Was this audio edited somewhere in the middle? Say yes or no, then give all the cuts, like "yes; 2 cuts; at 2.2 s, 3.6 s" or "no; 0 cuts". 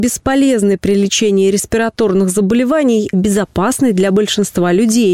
yes; 1 cut; at 3.1 s